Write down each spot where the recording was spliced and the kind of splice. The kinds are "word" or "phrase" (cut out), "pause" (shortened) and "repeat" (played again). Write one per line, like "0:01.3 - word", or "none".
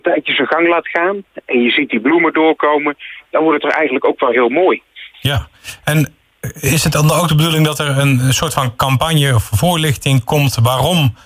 0:05.1 - pause